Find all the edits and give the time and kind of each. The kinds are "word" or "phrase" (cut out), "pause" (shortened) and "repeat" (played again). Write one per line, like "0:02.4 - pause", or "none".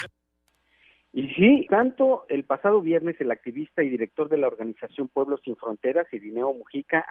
0:01.7 - word

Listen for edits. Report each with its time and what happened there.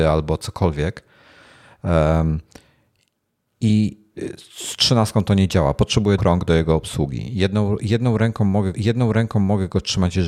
0:06.2 - word
0:08.7 - repeat

